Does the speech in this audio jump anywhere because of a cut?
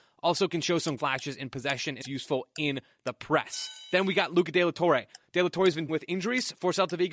yes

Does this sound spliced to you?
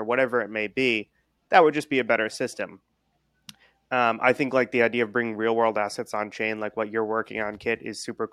no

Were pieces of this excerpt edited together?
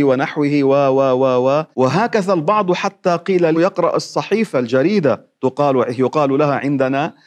yes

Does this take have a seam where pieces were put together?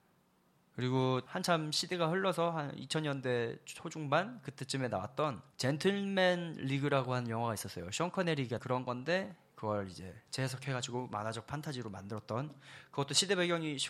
yes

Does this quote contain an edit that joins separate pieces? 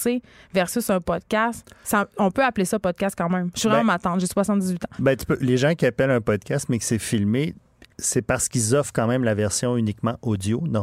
no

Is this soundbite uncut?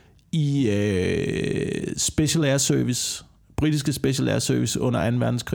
yes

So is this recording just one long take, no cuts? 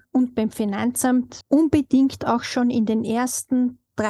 yes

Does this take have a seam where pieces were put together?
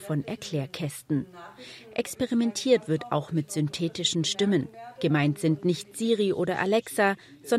no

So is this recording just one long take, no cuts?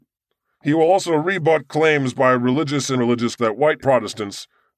no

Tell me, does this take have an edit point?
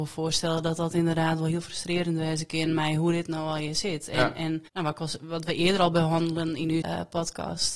yes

